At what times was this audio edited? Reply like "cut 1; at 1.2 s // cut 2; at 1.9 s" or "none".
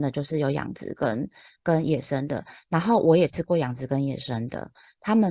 none